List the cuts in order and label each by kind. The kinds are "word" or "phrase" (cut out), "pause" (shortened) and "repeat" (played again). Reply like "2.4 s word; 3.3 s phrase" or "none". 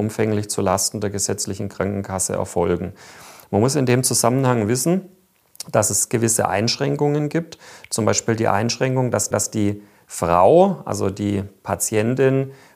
9.3 s repeat